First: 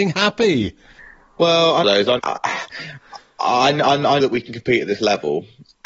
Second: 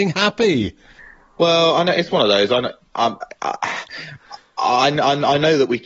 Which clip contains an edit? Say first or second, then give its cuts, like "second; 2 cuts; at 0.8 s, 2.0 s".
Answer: first; 3 cuts; at 1.8 s, 2.2 s, 4.2 s